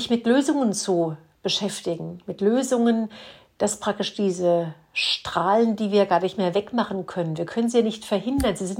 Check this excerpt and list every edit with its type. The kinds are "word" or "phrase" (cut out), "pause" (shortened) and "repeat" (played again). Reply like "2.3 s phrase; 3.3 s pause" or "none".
none